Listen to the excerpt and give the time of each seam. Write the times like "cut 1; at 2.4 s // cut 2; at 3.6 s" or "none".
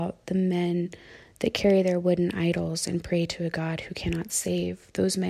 none